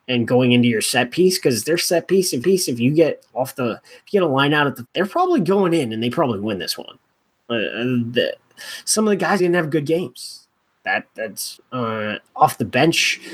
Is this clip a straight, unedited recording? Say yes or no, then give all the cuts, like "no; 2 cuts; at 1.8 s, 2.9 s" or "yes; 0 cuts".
no; 4 cuts; at 2.4 s, 4.8 s, 9.4 s, 11.6 s